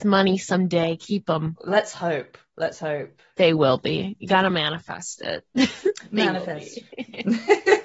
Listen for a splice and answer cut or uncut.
uncut